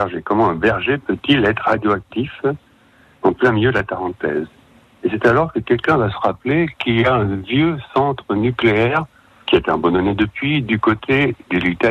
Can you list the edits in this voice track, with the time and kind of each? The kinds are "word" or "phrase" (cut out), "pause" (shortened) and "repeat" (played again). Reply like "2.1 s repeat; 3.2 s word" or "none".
none